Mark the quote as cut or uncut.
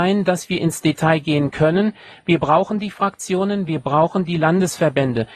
uncut